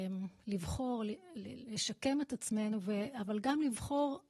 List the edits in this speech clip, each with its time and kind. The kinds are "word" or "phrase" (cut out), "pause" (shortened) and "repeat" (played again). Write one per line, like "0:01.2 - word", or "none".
none